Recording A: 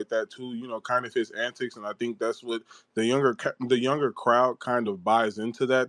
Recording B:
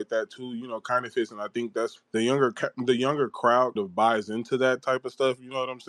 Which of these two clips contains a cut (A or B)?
B